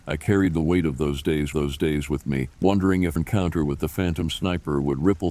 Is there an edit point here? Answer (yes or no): yes